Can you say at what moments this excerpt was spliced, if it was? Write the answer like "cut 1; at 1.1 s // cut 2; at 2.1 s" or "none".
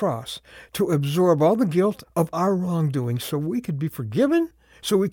cut 1; at 2.3 s